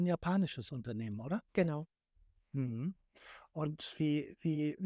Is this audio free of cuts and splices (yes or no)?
no